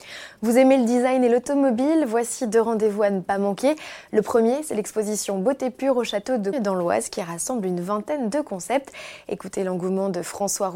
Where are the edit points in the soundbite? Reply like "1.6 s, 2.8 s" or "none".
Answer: 6.5 s